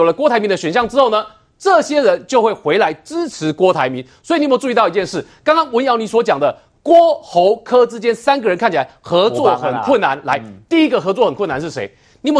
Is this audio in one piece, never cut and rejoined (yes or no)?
yes